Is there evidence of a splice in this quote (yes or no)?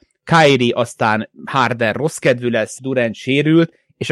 yes